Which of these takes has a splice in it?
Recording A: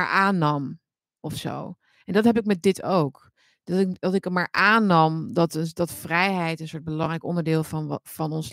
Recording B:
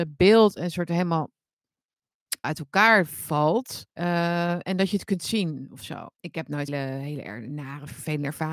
B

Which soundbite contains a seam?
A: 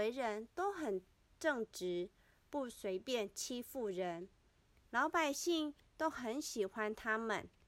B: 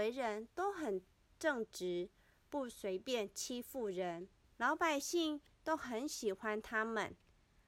B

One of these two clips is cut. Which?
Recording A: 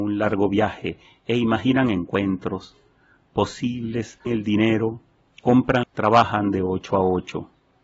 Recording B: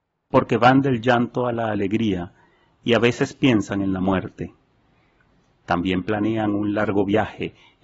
A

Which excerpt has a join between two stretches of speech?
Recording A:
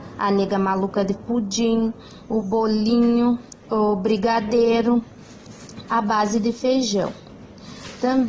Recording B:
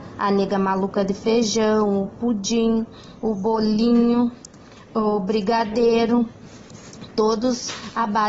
A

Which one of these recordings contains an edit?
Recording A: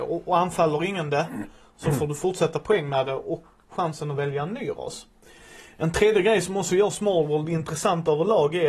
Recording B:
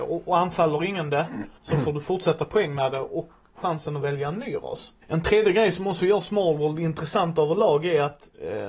B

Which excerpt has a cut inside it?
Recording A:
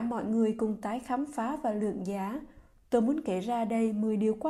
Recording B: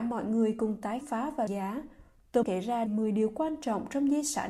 B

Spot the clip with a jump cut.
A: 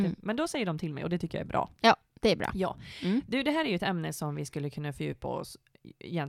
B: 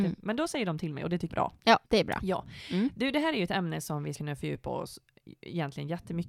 B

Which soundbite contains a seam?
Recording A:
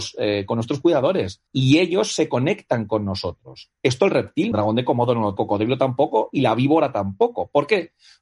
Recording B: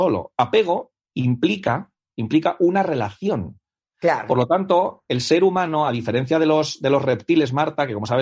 A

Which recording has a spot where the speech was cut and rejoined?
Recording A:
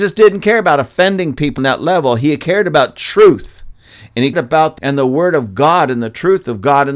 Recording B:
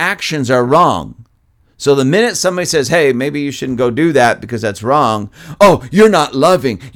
A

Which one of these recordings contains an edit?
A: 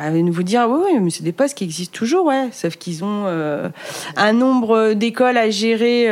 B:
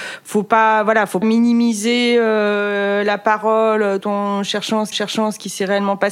B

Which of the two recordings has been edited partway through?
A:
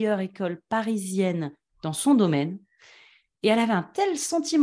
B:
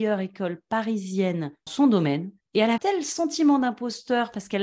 B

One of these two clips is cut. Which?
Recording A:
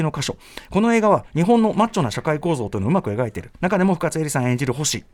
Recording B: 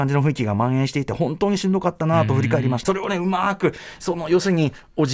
B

